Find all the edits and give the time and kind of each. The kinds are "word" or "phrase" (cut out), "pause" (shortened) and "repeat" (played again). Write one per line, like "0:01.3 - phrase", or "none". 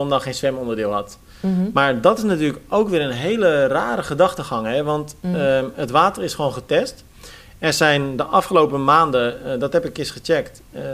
none